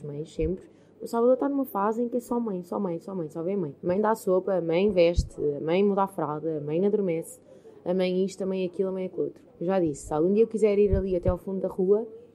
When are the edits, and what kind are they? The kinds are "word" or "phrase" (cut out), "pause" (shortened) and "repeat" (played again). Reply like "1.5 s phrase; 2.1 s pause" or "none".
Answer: 3.8 s pause; 9.5 s pause